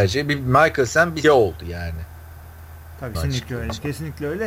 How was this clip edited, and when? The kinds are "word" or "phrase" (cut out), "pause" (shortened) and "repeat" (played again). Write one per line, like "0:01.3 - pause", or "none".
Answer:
0:01.2 - word
0:03.1 - word

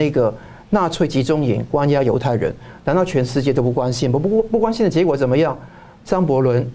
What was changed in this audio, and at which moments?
none

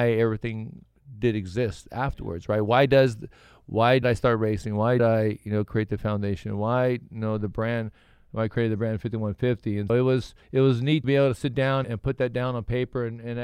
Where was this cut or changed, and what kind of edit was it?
0:04.0 - word
0:05.0 - word
0:09.9 - word
0:10.4 - pause
0:11.0 - word
0:11.8 - word

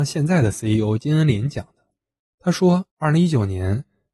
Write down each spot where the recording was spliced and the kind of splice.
0:02.9 - pause

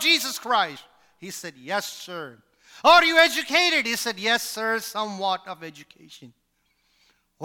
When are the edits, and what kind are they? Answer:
none

